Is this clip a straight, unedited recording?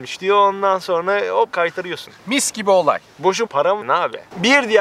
no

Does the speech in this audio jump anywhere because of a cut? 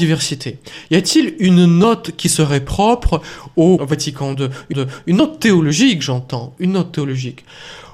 yes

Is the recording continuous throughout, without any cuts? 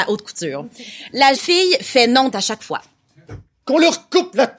no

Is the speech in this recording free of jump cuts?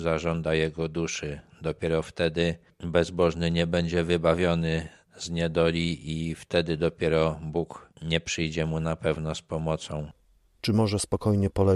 yes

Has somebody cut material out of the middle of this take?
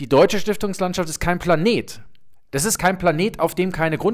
no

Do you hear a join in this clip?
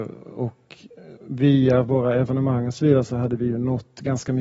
no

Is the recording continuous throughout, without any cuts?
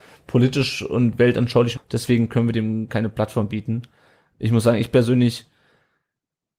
no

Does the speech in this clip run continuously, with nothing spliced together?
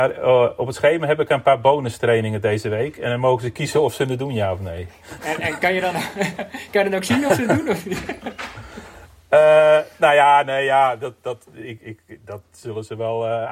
yes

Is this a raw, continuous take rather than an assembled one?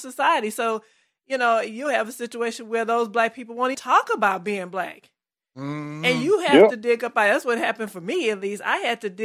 no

